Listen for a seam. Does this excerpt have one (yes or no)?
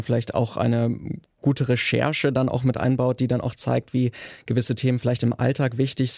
no